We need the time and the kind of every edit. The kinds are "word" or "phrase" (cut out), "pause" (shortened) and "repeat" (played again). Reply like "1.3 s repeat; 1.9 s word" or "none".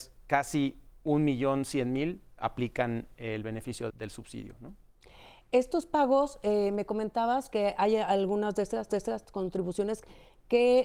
3.9 s word; 8.9 s repeat